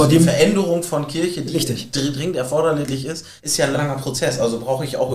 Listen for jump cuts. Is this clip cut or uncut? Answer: cut